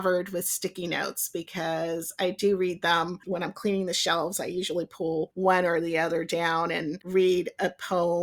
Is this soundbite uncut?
no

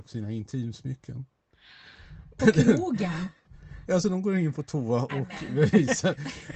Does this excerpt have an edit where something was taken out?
yes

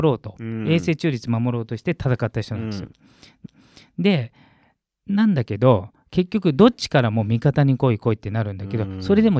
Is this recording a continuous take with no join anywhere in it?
no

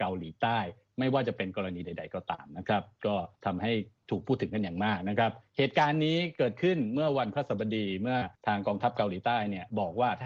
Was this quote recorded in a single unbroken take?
no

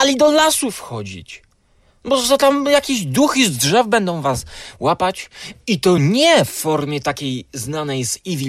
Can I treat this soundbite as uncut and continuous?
yes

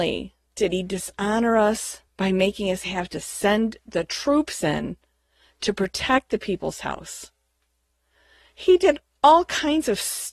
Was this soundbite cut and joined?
yes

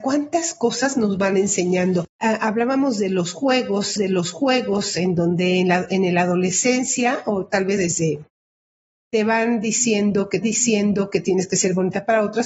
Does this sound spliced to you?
yes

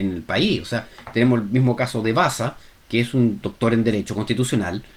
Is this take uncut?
yes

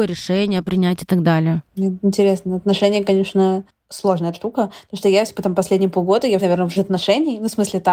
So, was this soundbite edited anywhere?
yes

